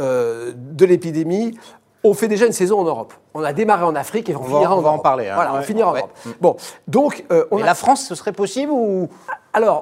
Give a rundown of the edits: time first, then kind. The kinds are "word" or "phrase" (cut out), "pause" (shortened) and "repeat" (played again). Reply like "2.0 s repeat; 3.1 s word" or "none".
none